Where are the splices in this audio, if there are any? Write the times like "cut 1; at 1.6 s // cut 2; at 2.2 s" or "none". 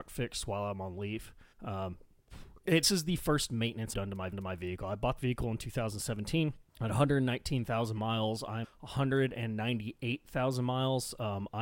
cut 1; at 1.5 s // cut 2; at 2.8 s // cut 3; at 3.9 s // cut 4; at 4.3 s // cut 5; at 5.2 s // cut 6; at 6.7 s // cut 7; at 8.6 s

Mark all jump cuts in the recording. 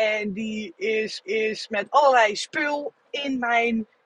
cut 1; at 1.2 s

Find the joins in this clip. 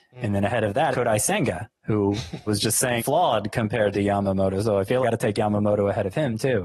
cut 1; at 0.9 s // cut 2; at 1.8 s // cut 3; at 2.5 s // cut 4; at 3.0 s // cut 5; at 5.0 s

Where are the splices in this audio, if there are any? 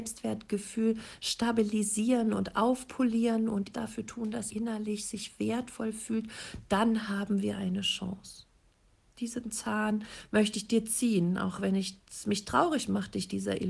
cut 1; at 3.7 s // cut 2; at 4.5 s // cut 3; at 9.0 s

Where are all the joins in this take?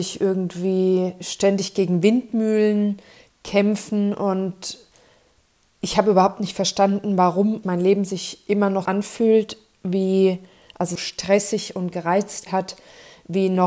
cut 1; at 7.6 s // cut 2; at 8.9 s // cut 3; at 11.0 s // cut 4; at 12.5 s

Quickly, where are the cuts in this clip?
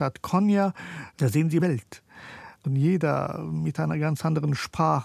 cut 1; at 1.6 s

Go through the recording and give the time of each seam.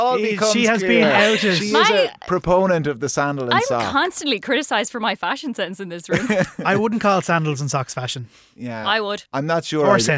none

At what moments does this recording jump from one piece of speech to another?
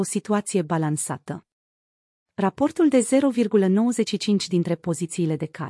none

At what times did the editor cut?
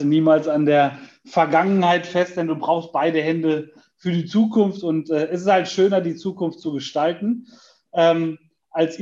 none

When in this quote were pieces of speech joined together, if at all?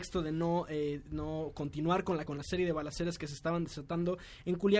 cut 1; at 2.3 s

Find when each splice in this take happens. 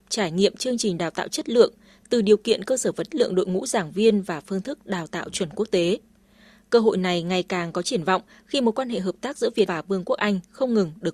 cut 1; at 3.1 s // cut 2; at 9.7 s

